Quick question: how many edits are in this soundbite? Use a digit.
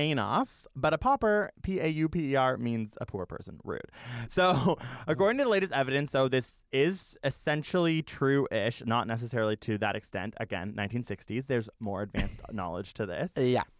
1